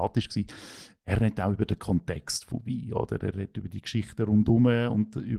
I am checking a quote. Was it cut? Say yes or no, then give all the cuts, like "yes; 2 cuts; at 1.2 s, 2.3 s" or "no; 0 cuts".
no; 0 cuts